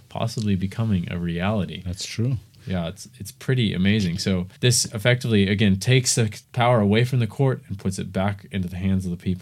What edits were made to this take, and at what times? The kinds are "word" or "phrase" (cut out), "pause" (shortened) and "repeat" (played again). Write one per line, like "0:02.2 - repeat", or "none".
0:04.6 - pause
0:06.4 - pause